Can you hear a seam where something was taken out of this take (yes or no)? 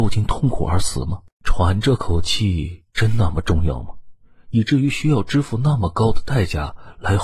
yes